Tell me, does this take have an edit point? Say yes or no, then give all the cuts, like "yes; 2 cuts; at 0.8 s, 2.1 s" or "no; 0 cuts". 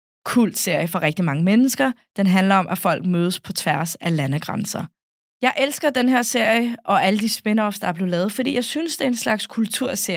no; 0 cuts